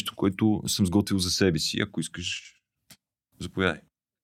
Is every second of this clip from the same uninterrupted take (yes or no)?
yes